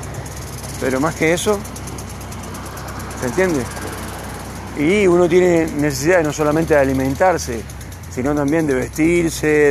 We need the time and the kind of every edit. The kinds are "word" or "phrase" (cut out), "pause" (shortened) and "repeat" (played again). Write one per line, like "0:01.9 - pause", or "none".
none